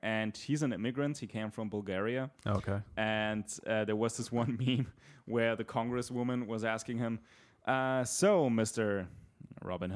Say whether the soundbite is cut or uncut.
uncut